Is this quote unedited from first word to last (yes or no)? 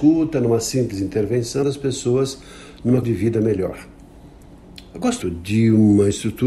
no